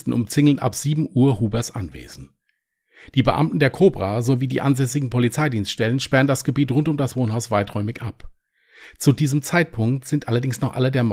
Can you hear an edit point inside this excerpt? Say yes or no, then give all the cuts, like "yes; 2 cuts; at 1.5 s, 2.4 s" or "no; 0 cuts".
no; 0 cuts